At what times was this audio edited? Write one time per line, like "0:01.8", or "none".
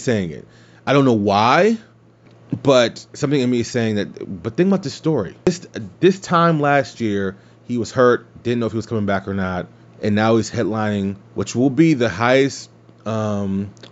0:05.4
0:09.8
0:11.2